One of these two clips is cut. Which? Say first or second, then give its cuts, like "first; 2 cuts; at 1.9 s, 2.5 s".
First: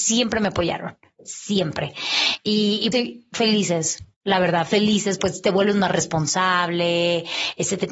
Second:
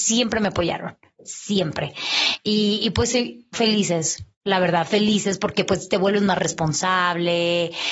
first; 2 cuts; at 2.9 s, 5.2 s